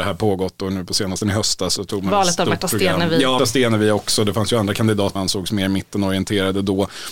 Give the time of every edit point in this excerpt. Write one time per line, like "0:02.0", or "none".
0:01.2
0:03.4
0:05.2